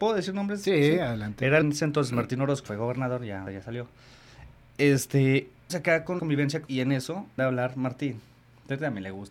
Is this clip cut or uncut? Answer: cut